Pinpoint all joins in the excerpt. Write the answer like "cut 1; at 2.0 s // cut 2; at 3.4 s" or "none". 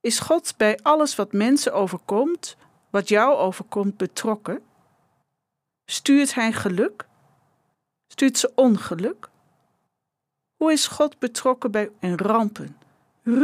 cut 1; at 12.0 s